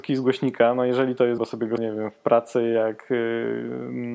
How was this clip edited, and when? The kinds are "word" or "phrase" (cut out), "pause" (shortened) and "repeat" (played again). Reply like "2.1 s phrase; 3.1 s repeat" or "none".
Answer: 1.4 s word; 1.8 s word